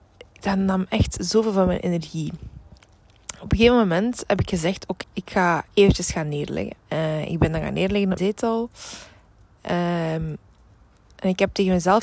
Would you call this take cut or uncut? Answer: cut